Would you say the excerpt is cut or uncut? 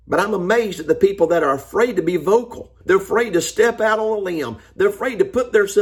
cut